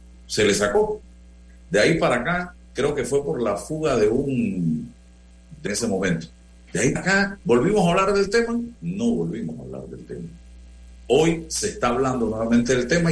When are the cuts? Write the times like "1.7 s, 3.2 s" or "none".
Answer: 5.7 s, 7.0 s, 8.8 s